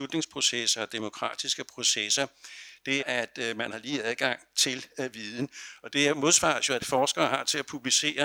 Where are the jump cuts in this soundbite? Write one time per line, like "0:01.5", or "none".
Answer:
0:03.0
0:06.8